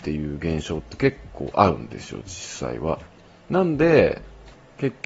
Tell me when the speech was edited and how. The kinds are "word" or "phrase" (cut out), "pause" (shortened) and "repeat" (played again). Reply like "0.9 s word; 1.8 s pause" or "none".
none